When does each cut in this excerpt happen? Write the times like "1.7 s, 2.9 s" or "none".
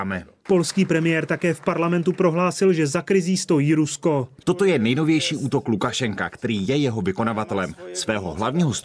4.3 s